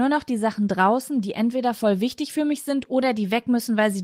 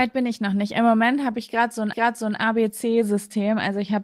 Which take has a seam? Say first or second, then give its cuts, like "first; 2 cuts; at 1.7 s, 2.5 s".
second; 1 cut; at 1.9 s